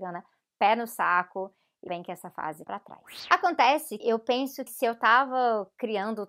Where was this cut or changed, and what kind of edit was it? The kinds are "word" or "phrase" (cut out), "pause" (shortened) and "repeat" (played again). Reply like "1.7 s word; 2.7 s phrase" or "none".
1.9 s word; 2.6 s word; 4.0 s word; 4.7 s word